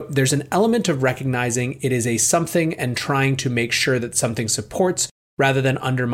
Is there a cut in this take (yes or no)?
no